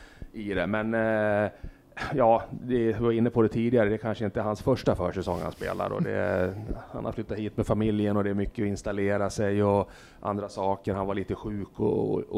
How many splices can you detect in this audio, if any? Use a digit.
0